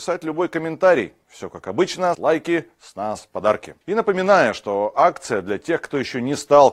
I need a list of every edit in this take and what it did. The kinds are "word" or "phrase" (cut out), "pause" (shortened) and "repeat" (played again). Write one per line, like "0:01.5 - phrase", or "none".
0:02.1 - phrase
0:03.8 - pause